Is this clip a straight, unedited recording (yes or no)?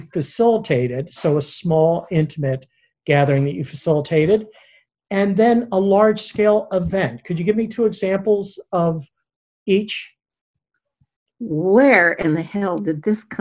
yes